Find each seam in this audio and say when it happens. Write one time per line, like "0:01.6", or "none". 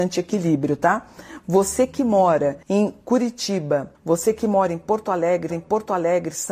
0:02.6
0:04.0
0:05.5